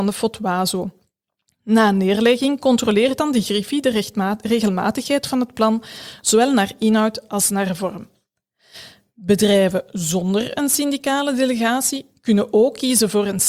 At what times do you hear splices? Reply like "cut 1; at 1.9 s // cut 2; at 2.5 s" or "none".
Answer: none